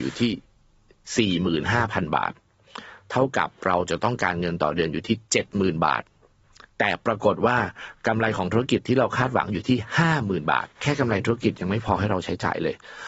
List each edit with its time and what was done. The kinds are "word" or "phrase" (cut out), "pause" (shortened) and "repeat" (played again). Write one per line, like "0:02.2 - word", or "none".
0:10.7 - pause